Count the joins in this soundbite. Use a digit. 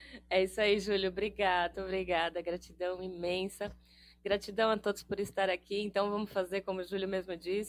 1